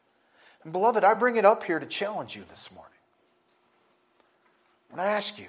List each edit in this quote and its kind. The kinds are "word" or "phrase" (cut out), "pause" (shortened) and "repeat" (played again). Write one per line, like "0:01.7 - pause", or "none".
none